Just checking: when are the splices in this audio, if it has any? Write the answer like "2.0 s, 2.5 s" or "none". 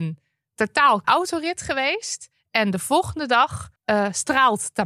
1.0 s, 3.8 s